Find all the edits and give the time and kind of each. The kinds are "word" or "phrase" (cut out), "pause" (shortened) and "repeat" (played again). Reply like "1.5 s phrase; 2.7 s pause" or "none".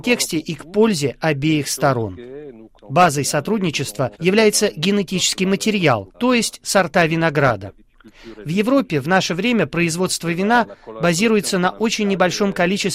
2.8 s pause; 4.1 s pause; 6.1 s pause